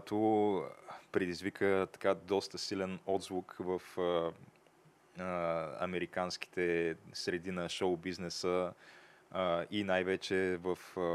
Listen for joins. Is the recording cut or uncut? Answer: uncut